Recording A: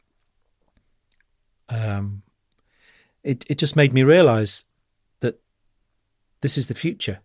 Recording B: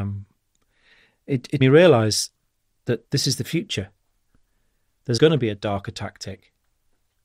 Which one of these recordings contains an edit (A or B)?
B